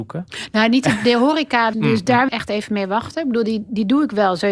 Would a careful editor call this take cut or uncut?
cut